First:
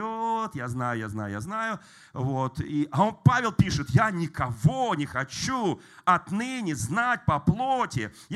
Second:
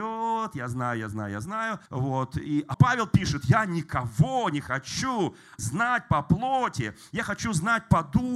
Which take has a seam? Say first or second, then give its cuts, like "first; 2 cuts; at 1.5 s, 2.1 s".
second; 3 cuts; at 1.9 s, 2.7 s, 5.6 s